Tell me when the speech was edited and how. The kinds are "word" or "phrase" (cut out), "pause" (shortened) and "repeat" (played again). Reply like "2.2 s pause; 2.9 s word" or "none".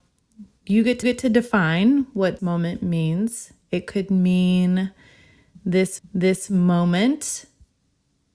1.0 s repeat; 2.4 s word; 6.0 s repeat